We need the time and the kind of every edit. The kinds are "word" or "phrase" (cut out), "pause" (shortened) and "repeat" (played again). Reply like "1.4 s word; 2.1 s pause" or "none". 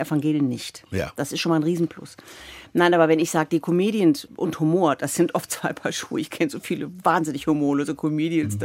none